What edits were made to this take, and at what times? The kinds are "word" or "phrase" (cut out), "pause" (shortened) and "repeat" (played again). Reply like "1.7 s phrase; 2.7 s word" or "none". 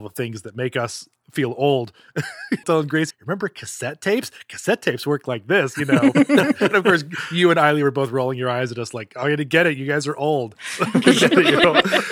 2.6 s phrase; 3.1 s word